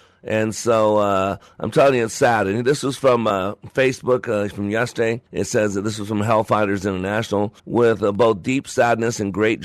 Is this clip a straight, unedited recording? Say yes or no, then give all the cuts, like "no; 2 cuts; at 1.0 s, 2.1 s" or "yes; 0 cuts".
no; 2 cuts; at 5.3 s, 7.6 s